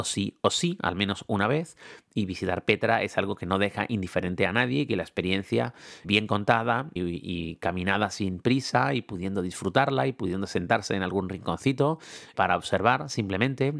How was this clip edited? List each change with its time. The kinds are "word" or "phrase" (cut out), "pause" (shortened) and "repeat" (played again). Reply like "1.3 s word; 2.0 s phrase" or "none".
6.0 s word; 7.0 s word; 12.3 s word